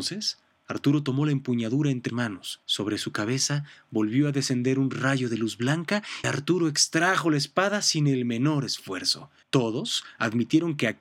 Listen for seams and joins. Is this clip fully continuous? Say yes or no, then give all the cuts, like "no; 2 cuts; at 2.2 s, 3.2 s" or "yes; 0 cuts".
no; 4 cuts; at 2.1 s, 2.6 s, 6.2 s, 9.4 s